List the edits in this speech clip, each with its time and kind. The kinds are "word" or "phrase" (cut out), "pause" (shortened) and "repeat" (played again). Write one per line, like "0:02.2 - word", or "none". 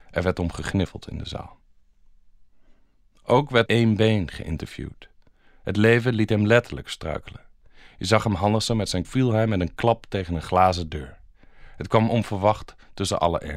0:03.7 - phrase
0:09.0 - phrase